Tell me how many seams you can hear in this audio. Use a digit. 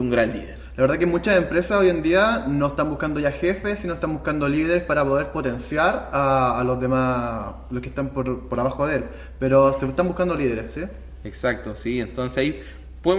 0